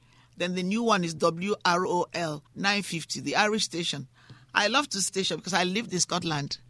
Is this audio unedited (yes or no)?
no